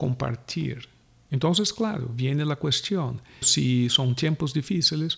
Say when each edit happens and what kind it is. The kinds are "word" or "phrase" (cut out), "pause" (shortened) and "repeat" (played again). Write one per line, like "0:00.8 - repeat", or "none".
0:03.4 - word